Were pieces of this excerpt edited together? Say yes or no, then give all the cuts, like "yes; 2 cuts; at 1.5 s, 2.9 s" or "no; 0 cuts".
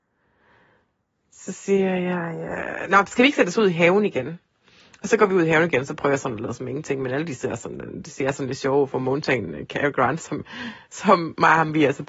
no; 0 cuts